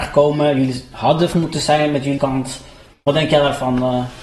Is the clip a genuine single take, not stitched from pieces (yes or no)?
no